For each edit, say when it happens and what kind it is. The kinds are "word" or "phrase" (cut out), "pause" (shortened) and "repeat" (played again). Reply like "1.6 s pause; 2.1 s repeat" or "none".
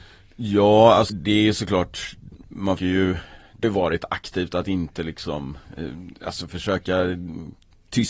1.1 s word; 2.8 s word; 3.6 s word